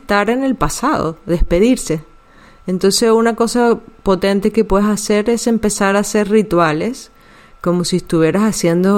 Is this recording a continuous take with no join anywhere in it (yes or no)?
yes